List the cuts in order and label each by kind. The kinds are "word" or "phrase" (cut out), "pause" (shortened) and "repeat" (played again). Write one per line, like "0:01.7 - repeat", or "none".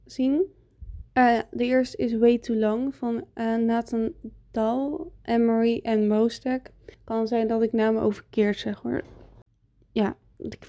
0:01.1 - pause
0:05.2 - pause
0:06.9 - pause